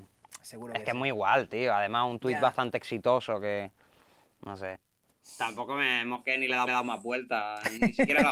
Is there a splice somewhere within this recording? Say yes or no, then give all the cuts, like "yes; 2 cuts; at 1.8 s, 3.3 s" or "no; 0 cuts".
yes; 1 cut; at 6.7 s